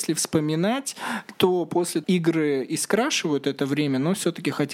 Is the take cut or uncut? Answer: cut